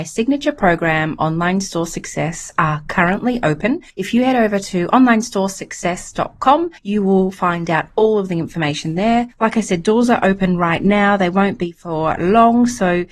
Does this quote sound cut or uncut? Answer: cut